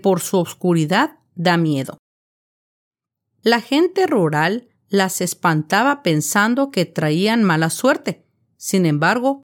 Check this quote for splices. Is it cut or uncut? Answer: uncut